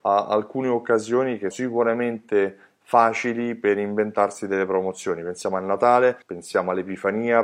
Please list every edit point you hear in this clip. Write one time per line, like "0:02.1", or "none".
0:01.5
0:06.2